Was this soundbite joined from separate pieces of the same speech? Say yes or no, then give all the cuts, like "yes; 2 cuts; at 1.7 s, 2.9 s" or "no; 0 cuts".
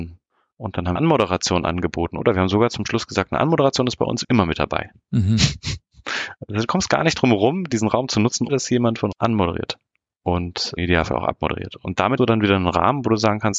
yes; 6 cuts; at 0.9 s, 4.2 s, 8.5 s, 9.1 s, 10.8 s, 12.2 s